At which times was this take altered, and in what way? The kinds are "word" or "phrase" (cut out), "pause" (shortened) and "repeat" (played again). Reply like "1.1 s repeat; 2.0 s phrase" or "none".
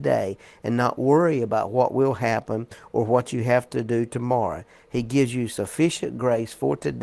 none